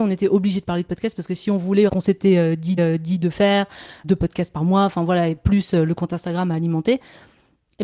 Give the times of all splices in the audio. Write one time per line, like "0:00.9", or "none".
0:01.9
0:02.8
0:04.0